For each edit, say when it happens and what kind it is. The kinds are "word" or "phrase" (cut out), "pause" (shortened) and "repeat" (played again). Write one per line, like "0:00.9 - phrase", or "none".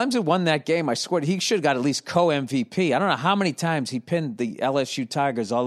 none